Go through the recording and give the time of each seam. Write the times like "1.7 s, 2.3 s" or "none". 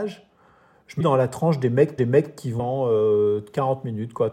1.0 s, 2.0 s, 2.6 s

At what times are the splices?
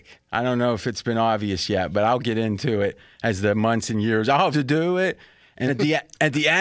4.5 s, 5.7 s

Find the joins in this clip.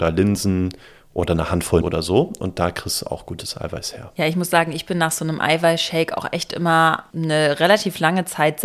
1.8 s

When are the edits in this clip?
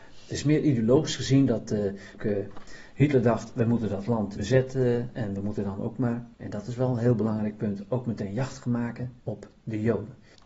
2.2 s, 4.4 s, 6.3 s, 9.2 s

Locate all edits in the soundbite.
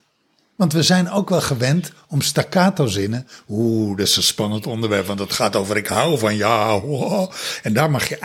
none

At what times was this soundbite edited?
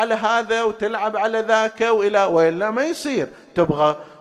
none

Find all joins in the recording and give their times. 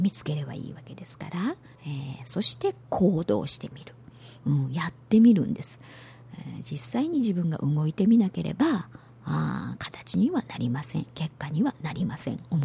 1.7 s

